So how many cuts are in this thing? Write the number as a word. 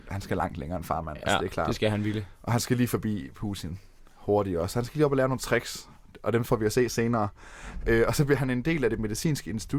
zero